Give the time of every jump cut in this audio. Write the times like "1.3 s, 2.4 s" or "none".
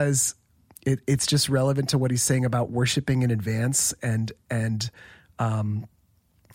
none